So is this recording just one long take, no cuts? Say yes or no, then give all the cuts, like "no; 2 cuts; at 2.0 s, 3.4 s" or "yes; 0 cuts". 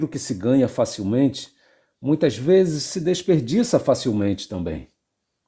yes; 0 cuts